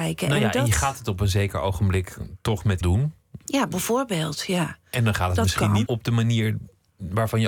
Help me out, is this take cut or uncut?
cut